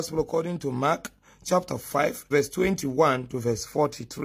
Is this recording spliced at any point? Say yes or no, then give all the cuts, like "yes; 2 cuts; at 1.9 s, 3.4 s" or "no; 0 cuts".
yes; 1 cut; at 2.3 s